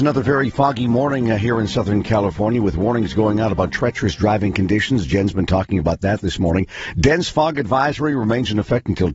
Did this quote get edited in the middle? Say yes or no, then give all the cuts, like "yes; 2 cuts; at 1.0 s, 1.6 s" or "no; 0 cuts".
no; 0 cuts